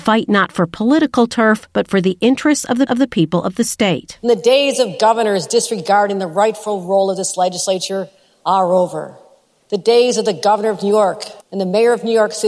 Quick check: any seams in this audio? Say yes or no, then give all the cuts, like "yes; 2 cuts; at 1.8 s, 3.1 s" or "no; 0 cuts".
yes; 2 cuts; at 2.9 s, 11.4 s